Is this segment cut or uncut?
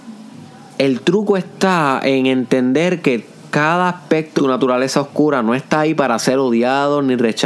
cut